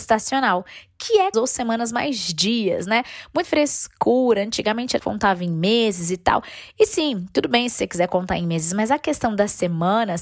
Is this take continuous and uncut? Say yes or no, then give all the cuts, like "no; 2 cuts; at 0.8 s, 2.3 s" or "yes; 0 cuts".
no; 3 cuts; at 1.3 s, 3.4 s, 5.0 s